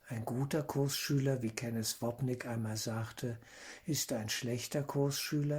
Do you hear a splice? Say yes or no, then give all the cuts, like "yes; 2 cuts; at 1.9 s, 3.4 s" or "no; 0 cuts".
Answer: no; 0 cuts